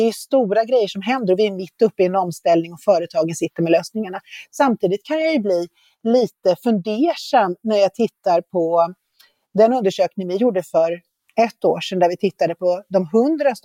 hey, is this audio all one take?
yes; 0 cuts

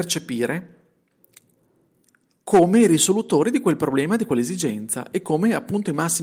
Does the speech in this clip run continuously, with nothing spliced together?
yes; 0 cuts

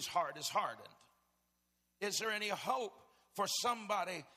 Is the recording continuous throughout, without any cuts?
yes; 0 cuts

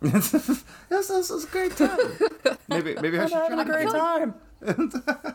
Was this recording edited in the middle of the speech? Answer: no; 0 cuts

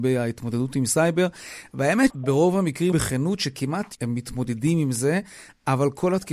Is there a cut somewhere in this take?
yes; 3 cuts; at 2.1 s, 2.9 s, 3.9 s

